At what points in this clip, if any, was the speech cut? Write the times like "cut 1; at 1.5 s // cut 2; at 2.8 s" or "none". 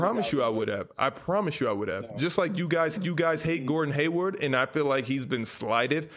cut 1; at 3.0 s